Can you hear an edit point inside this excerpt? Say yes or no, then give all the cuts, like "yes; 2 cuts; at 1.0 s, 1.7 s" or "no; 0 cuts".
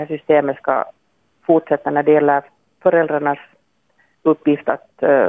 no; 0 cuts